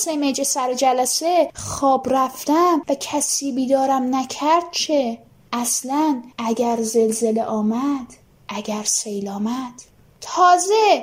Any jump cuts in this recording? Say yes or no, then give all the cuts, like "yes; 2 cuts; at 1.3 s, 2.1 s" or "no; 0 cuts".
no; 0 cuts